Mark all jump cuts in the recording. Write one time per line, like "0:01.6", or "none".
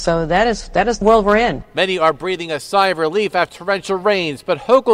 0:01.0
0:03.5